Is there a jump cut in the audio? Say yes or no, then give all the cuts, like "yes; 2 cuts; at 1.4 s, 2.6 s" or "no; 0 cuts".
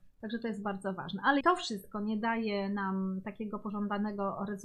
yes; 1 cut; at 1.4 s